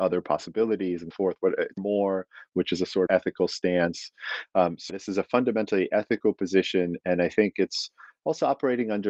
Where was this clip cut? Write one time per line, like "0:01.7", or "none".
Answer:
0:01.1
0:01.8
0:03.1
0:04.9